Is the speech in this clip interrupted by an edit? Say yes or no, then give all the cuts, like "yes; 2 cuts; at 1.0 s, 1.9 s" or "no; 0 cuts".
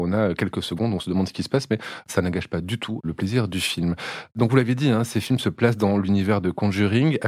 no; 0 cuts